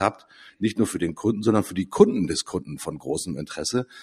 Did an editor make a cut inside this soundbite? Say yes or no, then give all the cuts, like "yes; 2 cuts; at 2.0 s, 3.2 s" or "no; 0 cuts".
no; 0 cuts